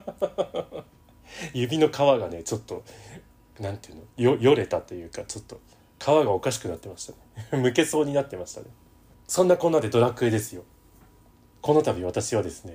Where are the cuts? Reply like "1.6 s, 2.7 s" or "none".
4.1 s